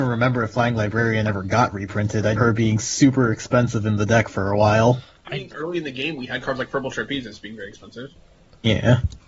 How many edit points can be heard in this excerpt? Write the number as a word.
two